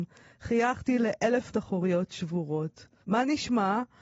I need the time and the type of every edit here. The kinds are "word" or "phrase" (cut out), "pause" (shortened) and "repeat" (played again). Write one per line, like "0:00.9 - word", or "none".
0:01.5 - word
0:03.0 - pause